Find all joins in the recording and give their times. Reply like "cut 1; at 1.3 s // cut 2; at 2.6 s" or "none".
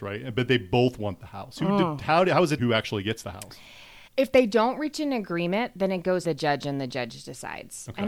cut 1; at 2.6 s // cut 2; at 4.1 s // cut 3; at 6.2 s